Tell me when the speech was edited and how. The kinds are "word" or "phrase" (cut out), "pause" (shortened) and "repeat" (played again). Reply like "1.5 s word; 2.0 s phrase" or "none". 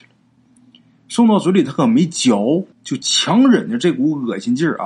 2.7 s pause